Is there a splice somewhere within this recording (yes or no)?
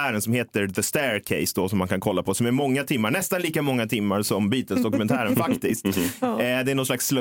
no